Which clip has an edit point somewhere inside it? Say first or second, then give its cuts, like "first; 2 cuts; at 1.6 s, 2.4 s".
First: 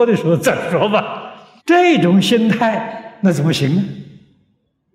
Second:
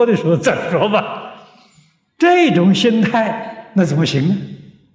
first; 1 cut; at 1.6 s